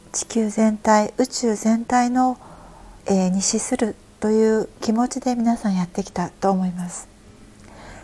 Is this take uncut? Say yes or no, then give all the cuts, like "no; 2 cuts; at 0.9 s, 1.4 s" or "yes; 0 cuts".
no; 2 cuts; at 3.0 s, 4.7 s